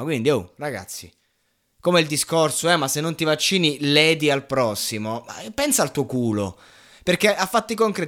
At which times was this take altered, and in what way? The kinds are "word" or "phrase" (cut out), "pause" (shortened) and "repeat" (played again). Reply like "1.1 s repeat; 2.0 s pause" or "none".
none

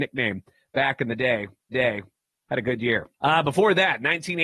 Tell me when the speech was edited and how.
1.7 s repeat; 3.1 s pause

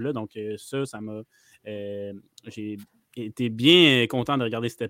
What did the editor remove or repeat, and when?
none

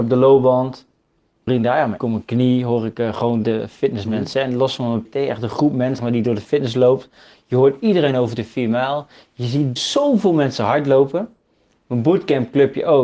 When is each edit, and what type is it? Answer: 1.5 s word; 2.0 s word; 3.4 s word; 5.0 s word; 6.0 s word; 9.8 s word

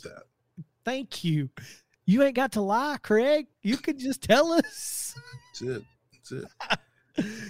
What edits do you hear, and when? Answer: none

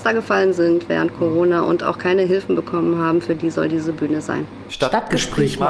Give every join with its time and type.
none

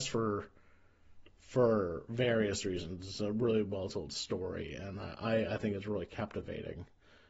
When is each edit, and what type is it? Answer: none

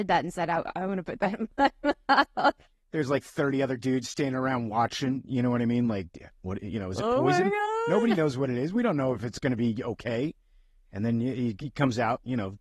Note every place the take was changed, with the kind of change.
6.3 s word

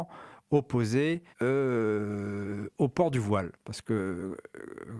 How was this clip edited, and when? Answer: 1.3 s pause; 3.5 s pause

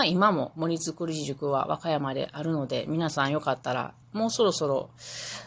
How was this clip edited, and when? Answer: 4.0 s pause

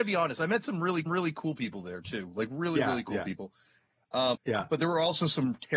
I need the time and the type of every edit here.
1.1 s repeat; 4.3 s word

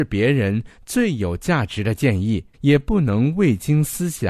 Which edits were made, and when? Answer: 2.5 s pause

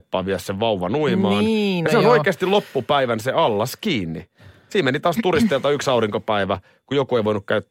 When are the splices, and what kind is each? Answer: none

